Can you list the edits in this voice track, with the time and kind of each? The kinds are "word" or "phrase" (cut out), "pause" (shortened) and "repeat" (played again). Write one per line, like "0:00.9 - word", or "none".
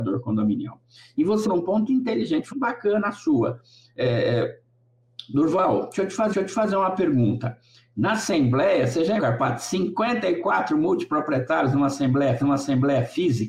0:01.5 - word
0:01.9 - word
0:02.5 - phrase
0:06.3 - repeat
0:09.2 - word
0:12.4 - repeat